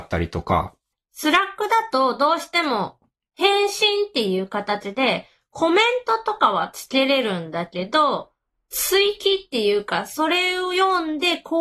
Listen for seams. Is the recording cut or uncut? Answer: uncut